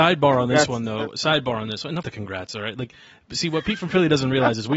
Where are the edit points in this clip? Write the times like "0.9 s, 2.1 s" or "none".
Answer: 2.0 s